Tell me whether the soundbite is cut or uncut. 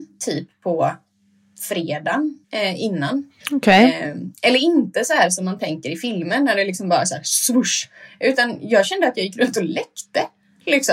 cut